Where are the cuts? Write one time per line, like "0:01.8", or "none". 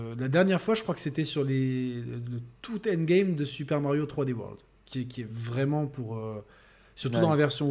none